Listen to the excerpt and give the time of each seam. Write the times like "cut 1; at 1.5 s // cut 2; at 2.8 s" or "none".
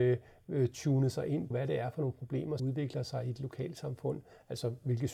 cut 1; at 1.5 s // cut 2; at 2.6 s